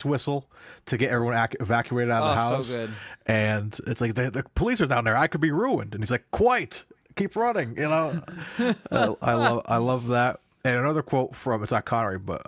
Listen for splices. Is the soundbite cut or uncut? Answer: uncut